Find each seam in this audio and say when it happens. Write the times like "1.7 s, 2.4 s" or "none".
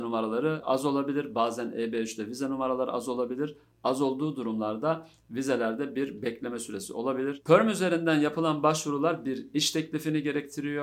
none